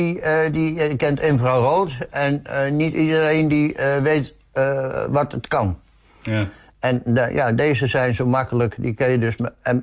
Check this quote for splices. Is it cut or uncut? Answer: uncut